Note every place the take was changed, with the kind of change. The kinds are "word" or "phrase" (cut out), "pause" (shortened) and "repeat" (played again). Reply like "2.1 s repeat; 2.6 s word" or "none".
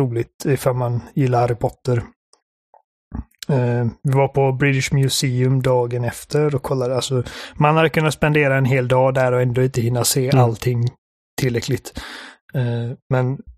none